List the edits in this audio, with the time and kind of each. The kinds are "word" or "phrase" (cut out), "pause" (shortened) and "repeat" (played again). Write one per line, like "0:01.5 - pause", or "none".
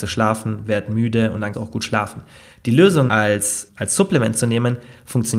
0:01.5 - word
0:03.1 - word
0:03.7 - word